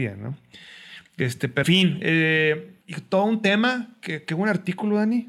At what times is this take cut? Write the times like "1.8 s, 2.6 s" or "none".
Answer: 1.6 s, 2.8 s